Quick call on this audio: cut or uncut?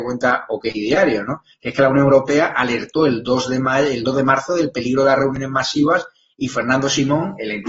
uncut